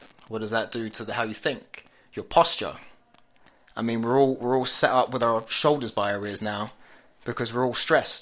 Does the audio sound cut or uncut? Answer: uncut